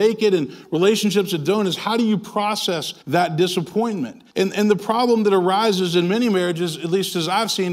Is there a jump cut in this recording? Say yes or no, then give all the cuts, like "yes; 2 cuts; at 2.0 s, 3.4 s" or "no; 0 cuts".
yes; 2 cuts; at 3.0 s, 4.3 s